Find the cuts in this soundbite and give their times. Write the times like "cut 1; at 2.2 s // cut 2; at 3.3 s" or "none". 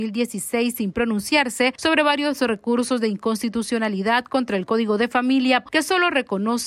cut 1; at 5.7 s